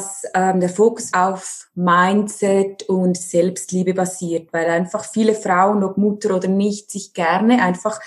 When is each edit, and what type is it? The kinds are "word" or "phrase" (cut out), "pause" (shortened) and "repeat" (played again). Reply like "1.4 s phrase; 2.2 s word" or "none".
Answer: 1.1 s word